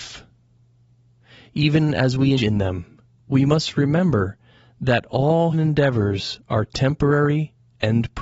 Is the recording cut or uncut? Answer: cut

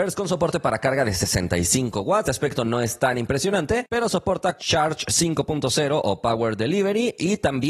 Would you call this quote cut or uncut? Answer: cut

